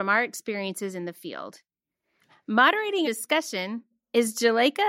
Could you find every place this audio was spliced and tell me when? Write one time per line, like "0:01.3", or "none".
0:03.0